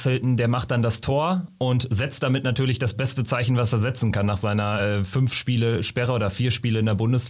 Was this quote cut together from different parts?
no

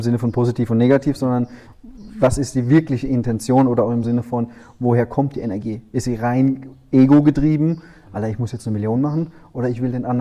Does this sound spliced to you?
no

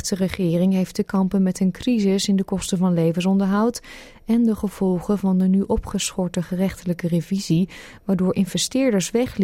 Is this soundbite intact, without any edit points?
yes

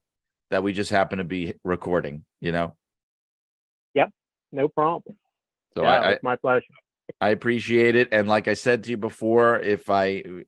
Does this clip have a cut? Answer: no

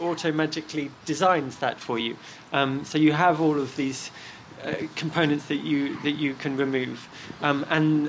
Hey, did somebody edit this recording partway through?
no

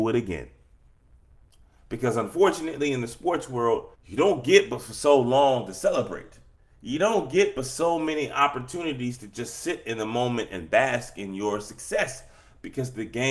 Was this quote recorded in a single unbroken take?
no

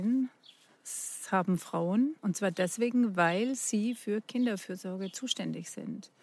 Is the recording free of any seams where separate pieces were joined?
no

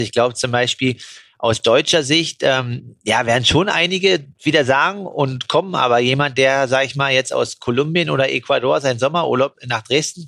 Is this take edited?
no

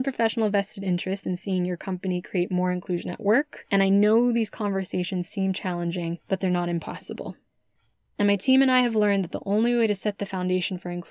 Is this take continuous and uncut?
yes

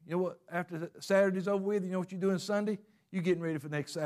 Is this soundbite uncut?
yes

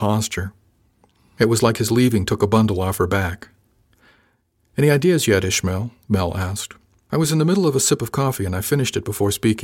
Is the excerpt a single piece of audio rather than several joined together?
yes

